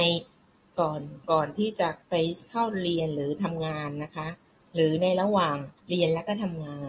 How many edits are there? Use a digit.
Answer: 4